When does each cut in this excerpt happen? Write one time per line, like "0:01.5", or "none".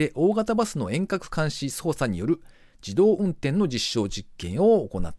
none